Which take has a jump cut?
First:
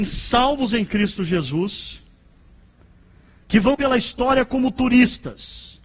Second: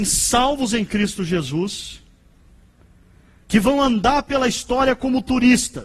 first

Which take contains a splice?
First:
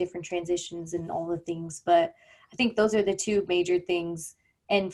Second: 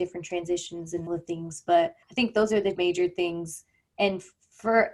second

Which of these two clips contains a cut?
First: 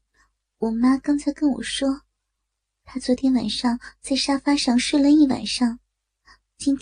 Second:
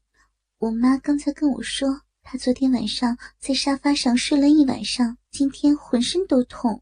second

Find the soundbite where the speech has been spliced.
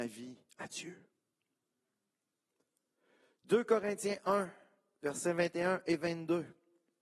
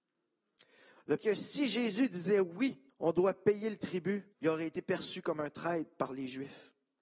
second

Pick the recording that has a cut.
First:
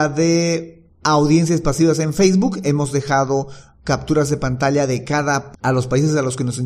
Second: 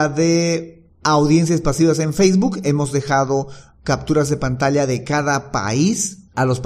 first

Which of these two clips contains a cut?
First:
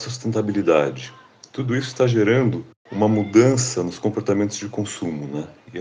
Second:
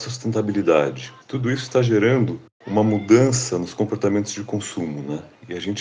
second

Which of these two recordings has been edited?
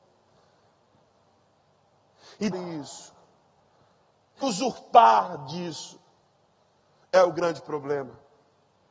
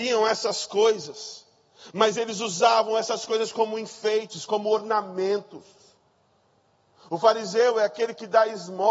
first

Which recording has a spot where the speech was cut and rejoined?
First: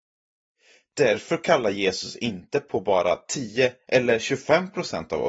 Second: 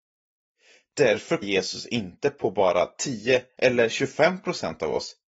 second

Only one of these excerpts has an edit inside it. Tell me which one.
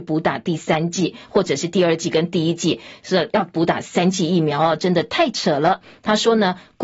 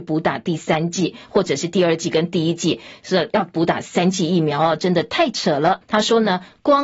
second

